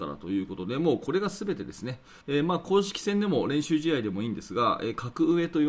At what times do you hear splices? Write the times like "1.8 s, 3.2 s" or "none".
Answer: 2.2 s